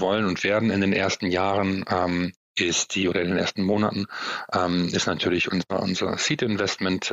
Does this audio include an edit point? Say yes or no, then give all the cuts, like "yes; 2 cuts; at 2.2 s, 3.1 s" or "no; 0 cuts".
no; 0 cuts